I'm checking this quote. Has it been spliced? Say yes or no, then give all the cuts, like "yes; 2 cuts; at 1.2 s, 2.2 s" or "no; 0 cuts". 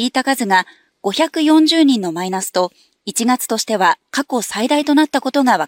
no; 0 cuts